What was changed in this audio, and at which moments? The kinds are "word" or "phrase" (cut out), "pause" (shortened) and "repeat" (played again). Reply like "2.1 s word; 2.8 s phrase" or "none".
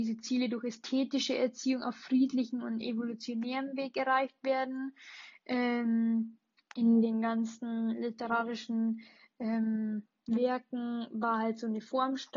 none